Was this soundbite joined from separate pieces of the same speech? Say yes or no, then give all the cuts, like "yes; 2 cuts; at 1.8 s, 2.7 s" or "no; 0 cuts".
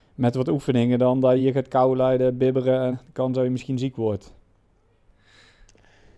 yes; 2 cuts; at 1.4 s, 2.9 s